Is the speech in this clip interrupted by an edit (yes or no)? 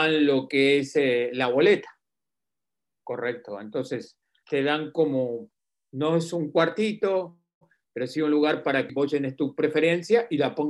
yes